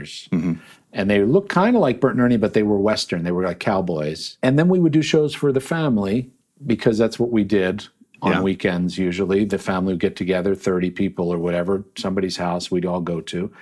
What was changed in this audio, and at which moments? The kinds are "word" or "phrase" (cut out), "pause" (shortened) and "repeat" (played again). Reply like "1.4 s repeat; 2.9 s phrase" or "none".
none